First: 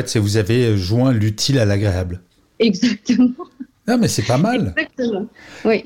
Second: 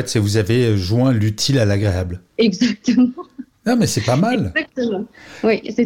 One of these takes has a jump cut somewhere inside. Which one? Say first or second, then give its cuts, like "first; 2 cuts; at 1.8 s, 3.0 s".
second; 1 cut; at 2.3 s